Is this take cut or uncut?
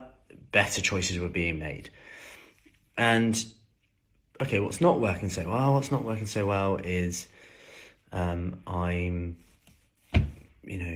uncut